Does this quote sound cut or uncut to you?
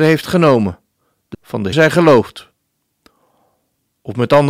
cut